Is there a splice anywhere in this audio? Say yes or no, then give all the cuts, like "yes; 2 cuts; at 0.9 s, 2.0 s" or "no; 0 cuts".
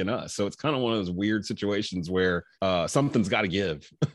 yes; 1 cut; at 2.5 s